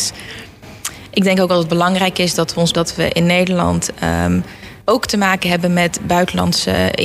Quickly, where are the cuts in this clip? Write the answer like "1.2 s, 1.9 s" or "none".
2.7 s, 4.8 s